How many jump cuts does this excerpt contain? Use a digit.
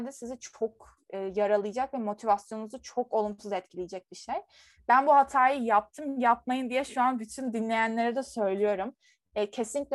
0